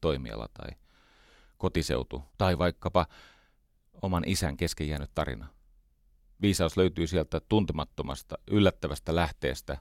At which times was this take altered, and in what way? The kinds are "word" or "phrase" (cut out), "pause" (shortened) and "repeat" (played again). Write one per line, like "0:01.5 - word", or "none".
0:02.3 - pause
0:06.0 - pause